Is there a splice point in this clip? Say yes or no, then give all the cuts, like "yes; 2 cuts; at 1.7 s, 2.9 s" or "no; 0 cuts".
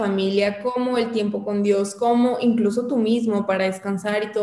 no; 0 cuts